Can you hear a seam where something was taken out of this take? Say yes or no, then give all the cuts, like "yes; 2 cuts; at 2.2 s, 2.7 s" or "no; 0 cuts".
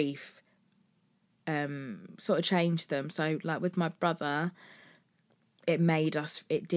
no; 0 cuts